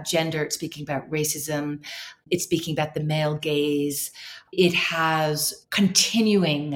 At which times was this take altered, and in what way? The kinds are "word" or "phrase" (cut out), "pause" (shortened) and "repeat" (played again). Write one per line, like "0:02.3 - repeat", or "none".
none